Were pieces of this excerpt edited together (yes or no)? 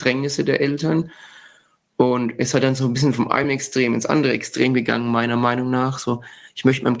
no